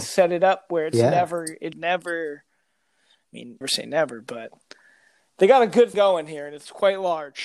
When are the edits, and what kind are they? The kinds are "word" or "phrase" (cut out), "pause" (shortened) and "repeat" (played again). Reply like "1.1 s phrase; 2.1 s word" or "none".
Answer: 1.7 s word; 3.6 s word; 5.9 s word